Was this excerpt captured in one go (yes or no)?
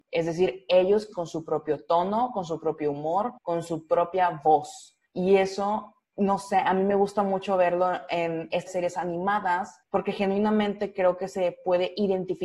no